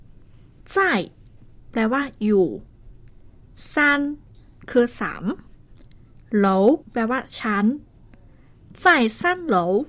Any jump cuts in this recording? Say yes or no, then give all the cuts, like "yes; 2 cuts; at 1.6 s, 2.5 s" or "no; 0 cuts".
yes; 1 cut; at 6.8 s